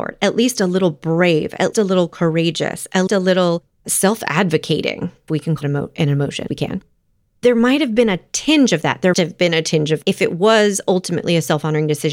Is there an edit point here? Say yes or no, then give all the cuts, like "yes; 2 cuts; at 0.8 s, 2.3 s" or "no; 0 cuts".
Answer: yes; 7 cuts; at 1.7 s, 3.1 s, 5.3 s, 5.6 s, 6.5 s, 9.1 s, 10.0 s